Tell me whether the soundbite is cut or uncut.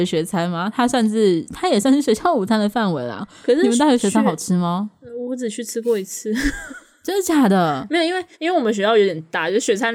cut